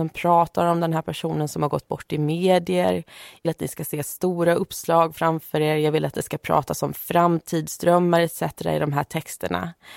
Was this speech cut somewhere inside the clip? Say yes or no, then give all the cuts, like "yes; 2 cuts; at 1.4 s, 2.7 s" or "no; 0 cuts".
yes; 1 cut; at 3.4 s